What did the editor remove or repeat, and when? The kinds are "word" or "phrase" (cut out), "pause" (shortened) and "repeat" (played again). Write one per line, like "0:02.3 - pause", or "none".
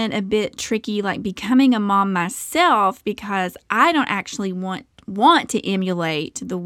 none